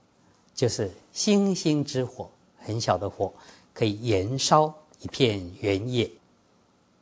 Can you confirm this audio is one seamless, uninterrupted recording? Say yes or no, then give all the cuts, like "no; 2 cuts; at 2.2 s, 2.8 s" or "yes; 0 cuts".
yes; 0 cuts